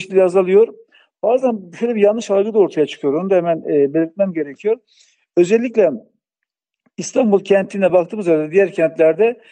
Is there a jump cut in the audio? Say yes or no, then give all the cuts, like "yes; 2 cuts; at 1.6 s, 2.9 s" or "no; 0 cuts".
no; 0 cuts